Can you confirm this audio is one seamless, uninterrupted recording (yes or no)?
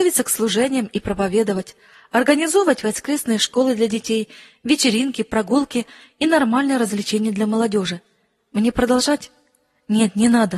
yes